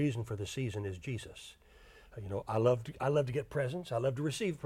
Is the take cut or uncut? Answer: uncut